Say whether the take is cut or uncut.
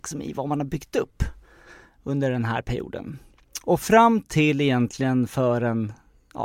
uncut